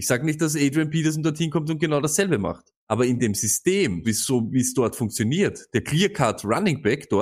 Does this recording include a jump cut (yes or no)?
yes